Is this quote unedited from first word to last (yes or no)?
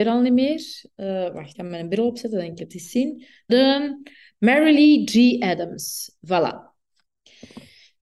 no